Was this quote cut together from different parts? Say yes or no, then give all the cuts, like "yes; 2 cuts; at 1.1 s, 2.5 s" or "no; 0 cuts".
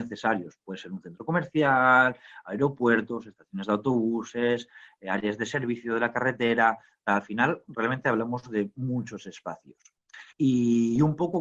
yes; 1 cut; at 10.3 s